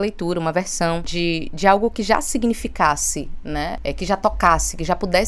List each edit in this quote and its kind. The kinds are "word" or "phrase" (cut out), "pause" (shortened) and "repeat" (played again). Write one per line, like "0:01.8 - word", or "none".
none